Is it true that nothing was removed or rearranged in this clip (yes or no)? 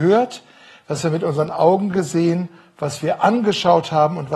yes